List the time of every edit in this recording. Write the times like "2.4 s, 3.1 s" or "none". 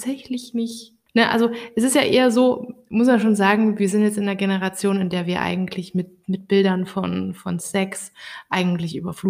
none